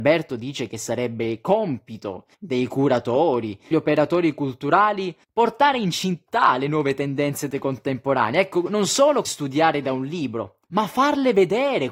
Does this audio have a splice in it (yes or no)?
yes